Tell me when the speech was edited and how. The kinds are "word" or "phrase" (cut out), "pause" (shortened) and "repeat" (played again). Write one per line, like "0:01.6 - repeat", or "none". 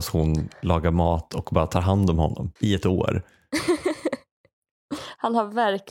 0:02.6 - pause